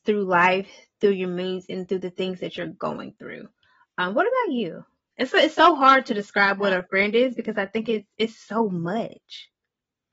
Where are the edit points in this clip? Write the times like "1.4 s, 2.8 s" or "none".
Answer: none